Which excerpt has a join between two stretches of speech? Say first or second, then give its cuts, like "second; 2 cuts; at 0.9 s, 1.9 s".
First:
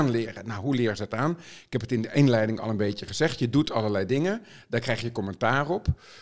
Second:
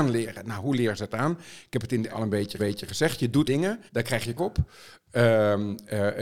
second; 5 cuts; at 2.1 s, 2.6 s, 3.5 s, 3.9 s, 4.4 s